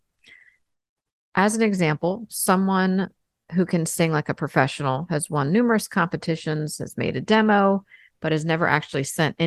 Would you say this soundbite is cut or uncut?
uncut